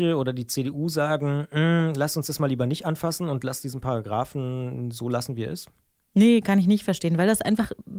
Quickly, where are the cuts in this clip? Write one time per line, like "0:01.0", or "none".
none